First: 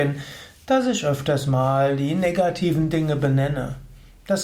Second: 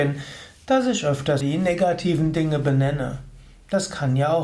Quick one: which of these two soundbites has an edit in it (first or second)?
second